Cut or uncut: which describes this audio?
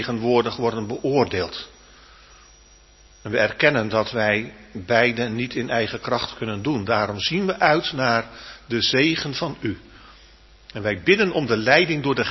uncut